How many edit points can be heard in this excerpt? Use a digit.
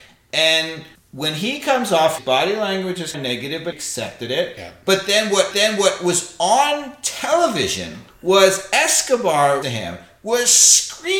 7